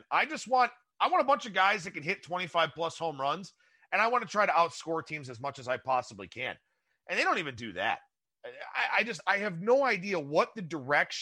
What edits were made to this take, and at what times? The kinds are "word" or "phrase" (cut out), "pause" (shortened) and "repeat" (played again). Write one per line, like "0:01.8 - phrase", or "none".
none